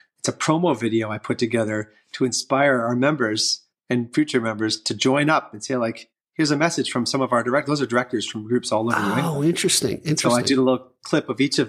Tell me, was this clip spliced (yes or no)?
no